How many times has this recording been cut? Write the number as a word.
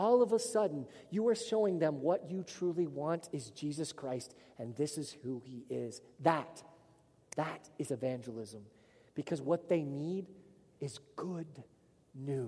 zero